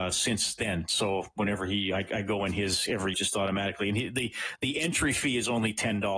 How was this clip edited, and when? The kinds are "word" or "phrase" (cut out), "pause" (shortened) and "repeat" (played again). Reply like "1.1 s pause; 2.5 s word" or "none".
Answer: 3.1 s phrase